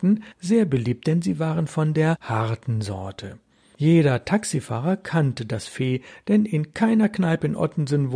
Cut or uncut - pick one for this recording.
uncut